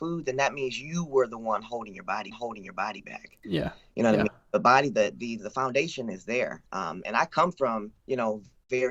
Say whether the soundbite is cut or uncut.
cut